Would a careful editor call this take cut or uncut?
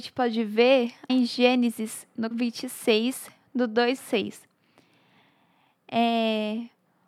cut